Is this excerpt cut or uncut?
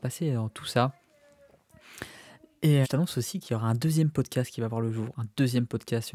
cut